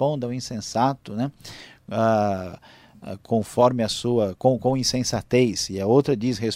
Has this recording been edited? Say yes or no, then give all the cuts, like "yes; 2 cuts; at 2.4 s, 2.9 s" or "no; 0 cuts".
no; 0 cuts